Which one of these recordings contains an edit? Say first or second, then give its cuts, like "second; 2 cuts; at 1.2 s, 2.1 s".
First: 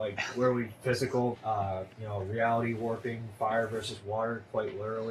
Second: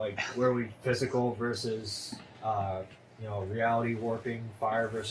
first; 2 cuts; at 1.3 s, 1.9 s